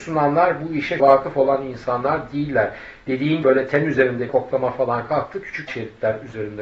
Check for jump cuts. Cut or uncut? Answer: cut